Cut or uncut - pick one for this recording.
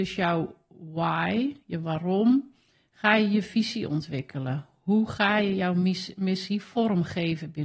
uncut